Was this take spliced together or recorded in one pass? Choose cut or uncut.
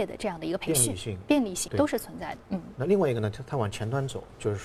cut